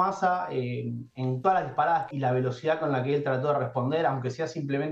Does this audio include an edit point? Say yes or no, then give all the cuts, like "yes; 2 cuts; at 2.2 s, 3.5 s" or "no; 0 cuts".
yes; 1 cut; at 2.1 s